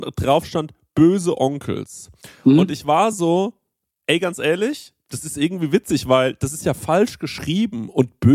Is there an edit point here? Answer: no; 0 cuts

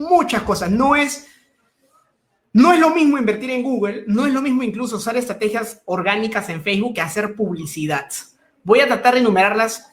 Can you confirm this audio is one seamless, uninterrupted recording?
yes; 0 cuts

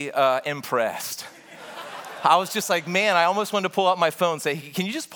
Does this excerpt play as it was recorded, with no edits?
yes; 0 cuts

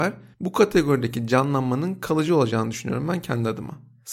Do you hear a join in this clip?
no; 0 cuts

